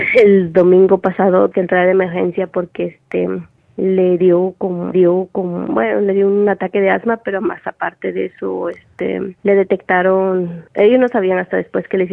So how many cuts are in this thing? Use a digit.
4